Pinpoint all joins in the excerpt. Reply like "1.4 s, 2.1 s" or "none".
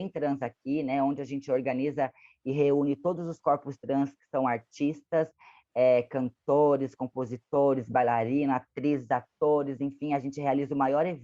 none